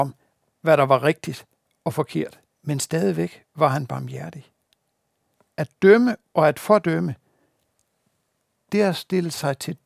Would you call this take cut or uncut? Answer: cut